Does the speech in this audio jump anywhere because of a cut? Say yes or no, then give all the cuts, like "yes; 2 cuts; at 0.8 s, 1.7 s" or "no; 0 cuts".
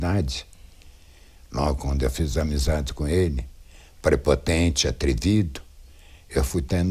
no; 0 cuts